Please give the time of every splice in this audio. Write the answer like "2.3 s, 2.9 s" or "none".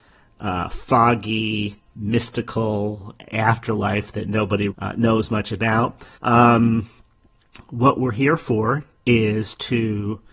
4.7 s, 6.1 s